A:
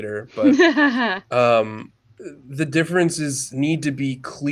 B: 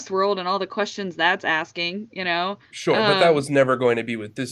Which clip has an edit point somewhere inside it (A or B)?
B